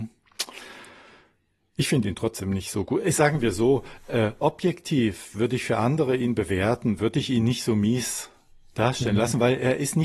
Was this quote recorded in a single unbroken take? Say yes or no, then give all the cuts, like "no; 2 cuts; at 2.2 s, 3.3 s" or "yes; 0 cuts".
yes; 0 cuts